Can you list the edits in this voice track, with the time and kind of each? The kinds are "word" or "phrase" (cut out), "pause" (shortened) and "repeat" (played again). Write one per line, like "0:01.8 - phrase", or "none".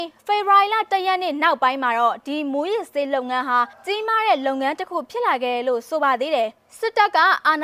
0:03.7 - pause